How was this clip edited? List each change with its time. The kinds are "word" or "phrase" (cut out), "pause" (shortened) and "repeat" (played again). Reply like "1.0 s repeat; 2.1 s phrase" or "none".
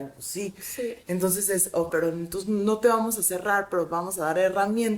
1.9 s phrase

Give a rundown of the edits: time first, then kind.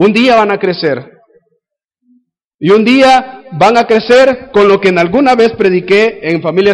none

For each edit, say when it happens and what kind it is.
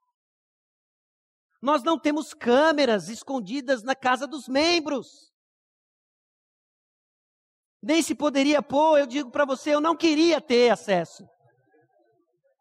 none

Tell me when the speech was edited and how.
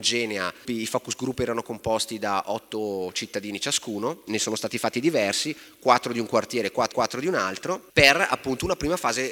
6.9 s repeat

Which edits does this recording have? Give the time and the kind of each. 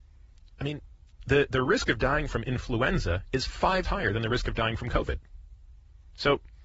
3.8 s word

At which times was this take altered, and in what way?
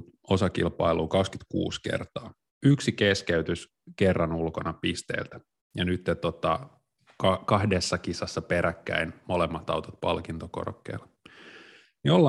2.5 s pause; 5.6 s pause

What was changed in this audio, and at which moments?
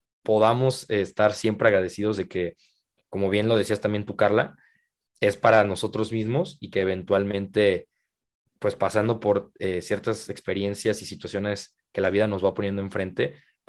none

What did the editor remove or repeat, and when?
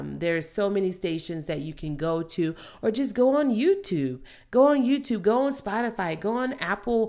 none

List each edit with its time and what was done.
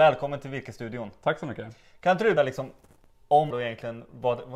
2.4 s word; 3.5 s word

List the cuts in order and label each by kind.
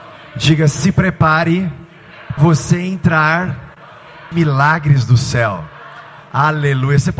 2.4 s word; 4.3 s phrase

